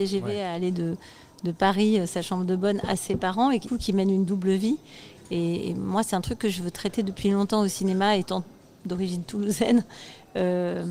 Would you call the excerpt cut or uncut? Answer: cut